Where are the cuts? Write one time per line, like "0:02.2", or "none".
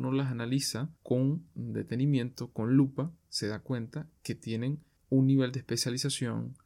0:01.0